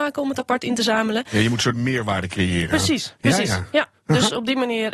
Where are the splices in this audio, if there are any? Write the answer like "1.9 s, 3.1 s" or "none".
1.7 s